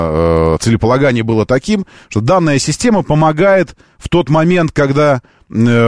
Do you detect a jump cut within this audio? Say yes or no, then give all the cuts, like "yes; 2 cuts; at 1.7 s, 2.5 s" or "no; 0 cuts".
no; 0 cuts